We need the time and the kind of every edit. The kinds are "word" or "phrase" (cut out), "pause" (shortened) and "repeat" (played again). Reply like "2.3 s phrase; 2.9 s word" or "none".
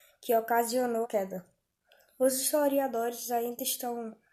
1.0 s word